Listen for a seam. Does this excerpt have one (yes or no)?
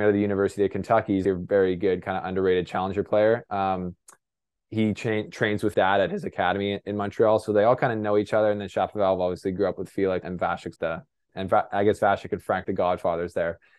yes